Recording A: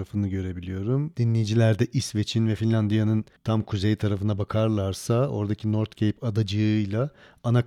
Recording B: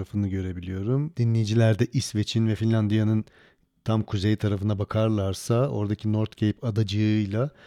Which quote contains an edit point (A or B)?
A